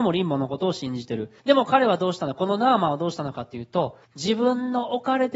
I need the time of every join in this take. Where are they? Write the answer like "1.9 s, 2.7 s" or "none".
1.4 s, 4.0 s